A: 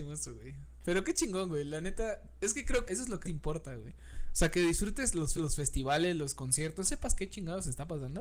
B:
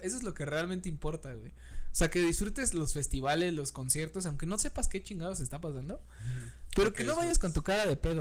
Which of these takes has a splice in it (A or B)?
A